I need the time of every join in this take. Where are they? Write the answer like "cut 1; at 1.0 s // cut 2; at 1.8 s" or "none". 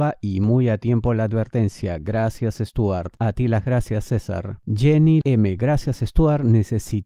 cut 1; at 5.2 s